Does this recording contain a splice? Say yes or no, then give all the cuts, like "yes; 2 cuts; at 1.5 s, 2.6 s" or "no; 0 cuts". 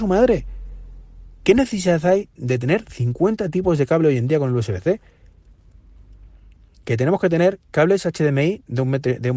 no; 0 cuts